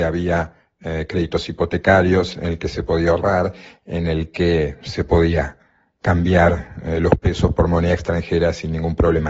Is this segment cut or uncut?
uncut